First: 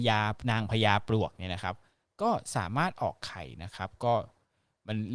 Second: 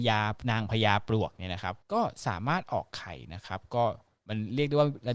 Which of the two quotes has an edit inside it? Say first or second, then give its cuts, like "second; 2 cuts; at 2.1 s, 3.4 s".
second; 2 cuts; at 1.8 s, 4.2 s